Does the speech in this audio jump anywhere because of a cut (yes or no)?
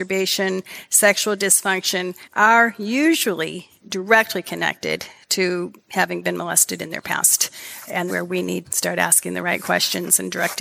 yes